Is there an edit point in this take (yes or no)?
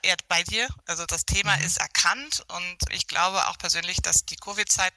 yes